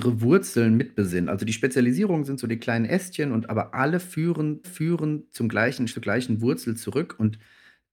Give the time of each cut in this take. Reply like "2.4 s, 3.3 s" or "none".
4.6 s, 5.9 s